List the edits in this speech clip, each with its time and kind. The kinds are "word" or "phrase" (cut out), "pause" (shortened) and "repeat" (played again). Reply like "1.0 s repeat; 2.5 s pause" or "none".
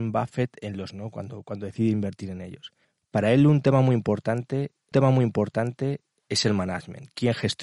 0.9 s word; 2.8 s pause; 4.9 s repeat